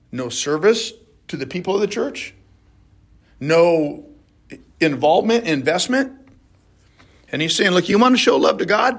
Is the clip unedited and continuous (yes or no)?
yes